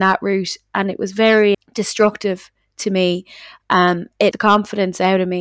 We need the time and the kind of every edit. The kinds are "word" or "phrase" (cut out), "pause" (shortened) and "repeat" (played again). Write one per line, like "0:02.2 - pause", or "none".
0:01.5 - word
0:04.3 - word